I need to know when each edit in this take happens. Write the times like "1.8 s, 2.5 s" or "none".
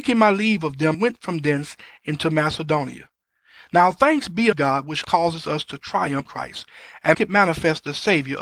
0.9 s, 4.5 s, 5.0 s, 6.3 s, 7.1 s